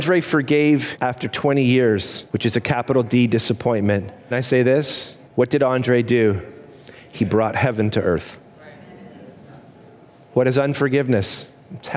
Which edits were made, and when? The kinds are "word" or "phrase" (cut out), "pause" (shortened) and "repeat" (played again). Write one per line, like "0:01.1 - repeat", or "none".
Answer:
0:00.9 - phrase
0:02.3 - pause
0:04.3 - word
0:05.3 - pause